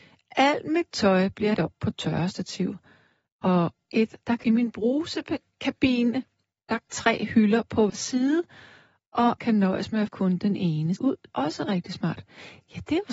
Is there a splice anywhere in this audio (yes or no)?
yes